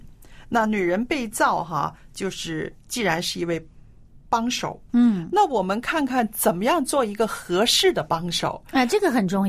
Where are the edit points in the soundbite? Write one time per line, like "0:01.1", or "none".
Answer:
0:04.9